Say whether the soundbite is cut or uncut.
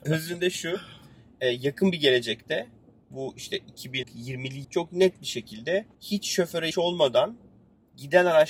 cut